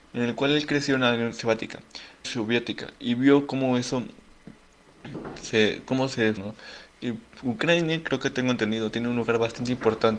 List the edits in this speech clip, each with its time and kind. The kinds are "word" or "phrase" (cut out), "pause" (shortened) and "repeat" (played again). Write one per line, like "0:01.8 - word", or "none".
0:02.2 - word
0:06.4 - phrase

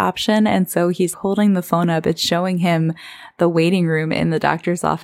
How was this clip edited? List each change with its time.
0:01.1 - word

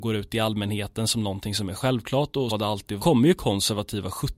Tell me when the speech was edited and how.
0:02.5 - word
0:03.0 - phrase

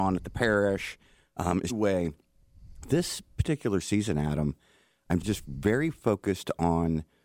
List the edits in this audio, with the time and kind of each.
0:01.7 - phrase
0:05.2 - phrase

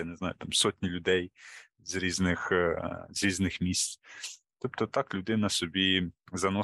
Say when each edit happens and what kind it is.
none

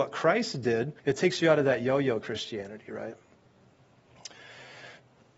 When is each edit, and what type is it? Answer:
0:01.0 - pause

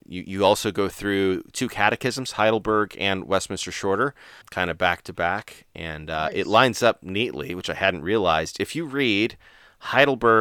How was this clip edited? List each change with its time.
0:04.4 - word

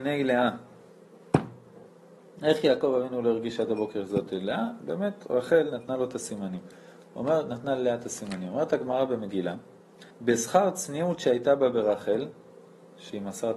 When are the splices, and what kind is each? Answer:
0:10.1 - pause

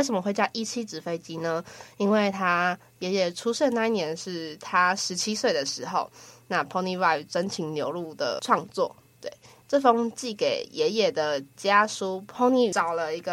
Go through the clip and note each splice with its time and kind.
none

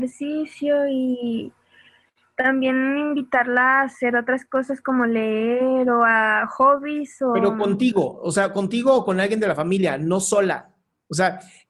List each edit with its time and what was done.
none

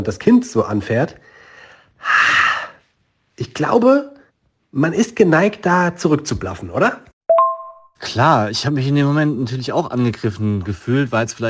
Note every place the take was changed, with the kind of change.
none

